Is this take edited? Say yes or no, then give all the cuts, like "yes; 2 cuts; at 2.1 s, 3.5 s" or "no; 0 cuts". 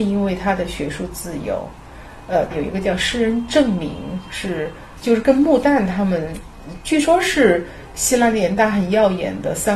yes; 1 cut; at 2.5 s